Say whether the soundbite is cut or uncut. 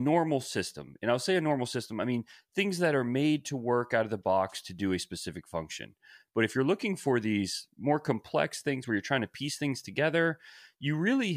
uncut